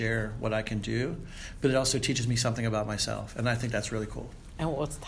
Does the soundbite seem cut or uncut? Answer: uncut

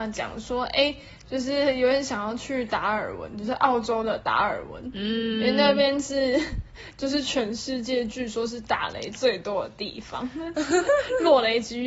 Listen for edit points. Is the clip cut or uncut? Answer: uncut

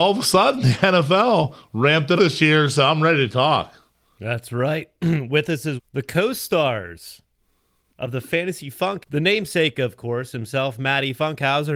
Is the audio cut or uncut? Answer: cut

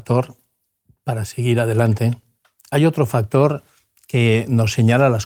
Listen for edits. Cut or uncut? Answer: uncut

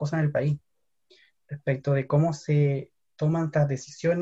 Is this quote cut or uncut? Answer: uncut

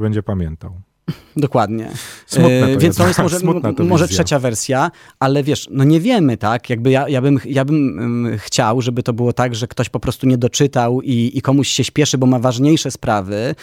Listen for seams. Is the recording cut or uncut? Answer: uncut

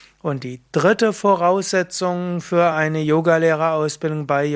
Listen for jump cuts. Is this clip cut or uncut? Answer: uncut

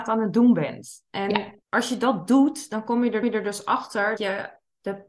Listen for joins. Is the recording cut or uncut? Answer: cut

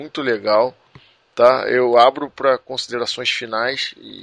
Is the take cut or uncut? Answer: uncut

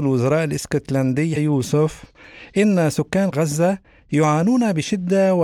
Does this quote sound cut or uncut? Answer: cut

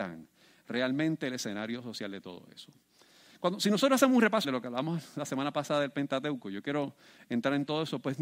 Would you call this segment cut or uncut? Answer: cut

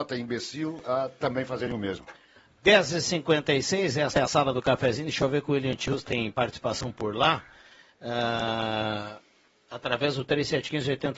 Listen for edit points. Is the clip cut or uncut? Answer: uncut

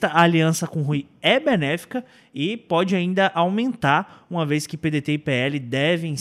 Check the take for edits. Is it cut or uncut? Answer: uncut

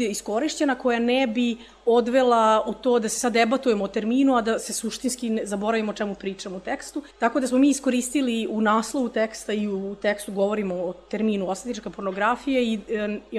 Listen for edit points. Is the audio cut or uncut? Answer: cut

